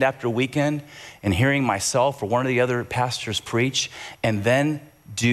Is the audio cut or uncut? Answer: uncut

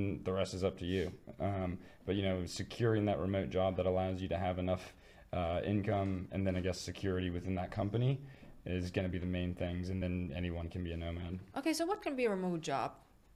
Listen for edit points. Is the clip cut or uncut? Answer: uncut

